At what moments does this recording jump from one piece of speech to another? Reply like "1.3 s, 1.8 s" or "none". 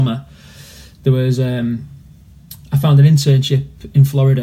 none